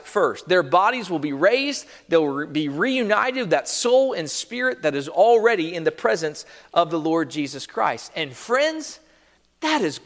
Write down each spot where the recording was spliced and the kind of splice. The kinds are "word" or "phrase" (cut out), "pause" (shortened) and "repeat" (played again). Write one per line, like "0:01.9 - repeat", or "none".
none